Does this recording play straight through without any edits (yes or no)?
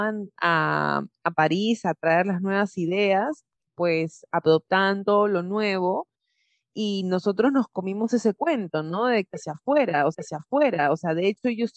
no